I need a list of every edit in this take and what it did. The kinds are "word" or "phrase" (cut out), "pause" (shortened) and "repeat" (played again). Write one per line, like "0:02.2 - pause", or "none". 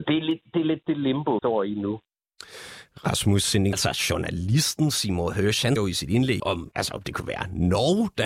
0:01.4 - word
0:03.7 - word
0:05.8 - word
0:06.4 - word
0:06.7 - word